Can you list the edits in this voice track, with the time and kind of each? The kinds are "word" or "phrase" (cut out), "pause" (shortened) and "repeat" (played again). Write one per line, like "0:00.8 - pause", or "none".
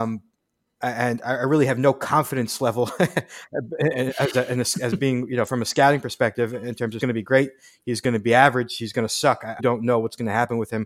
0:07.0 - phrase
0:09.6 - word